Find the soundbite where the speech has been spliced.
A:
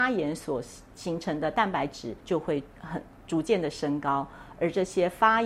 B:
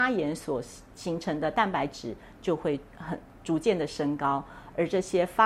A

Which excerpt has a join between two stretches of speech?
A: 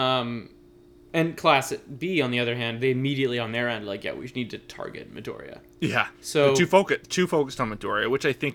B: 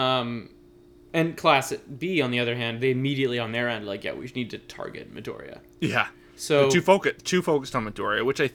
A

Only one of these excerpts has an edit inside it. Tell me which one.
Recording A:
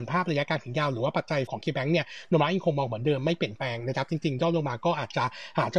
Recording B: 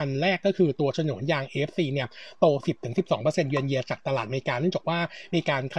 A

